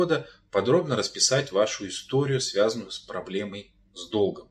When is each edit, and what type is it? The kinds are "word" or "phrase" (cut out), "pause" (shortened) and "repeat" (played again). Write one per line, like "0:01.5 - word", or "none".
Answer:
none